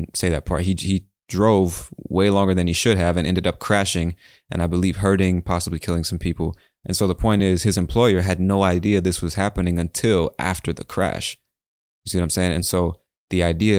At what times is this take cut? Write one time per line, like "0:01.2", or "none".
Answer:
none